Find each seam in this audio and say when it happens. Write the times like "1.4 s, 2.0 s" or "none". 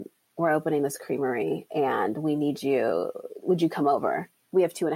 none